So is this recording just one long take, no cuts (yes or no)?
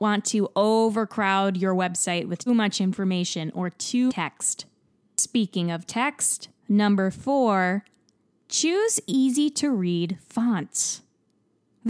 no